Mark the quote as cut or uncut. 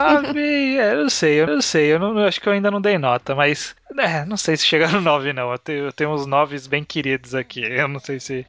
cut